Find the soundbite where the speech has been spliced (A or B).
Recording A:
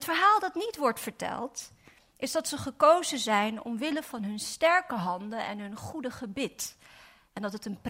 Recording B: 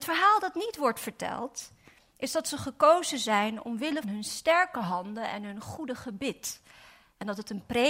B